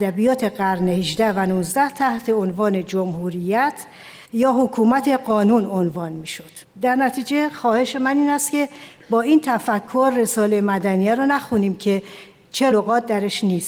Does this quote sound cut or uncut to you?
cut